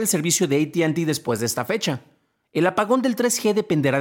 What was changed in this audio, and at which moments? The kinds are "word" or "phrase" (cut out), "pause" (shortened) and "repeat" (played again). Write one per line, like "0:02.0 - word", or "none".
none